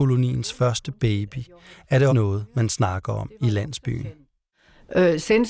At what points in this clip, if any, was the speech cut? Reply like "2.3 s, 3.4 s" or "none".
2.1 s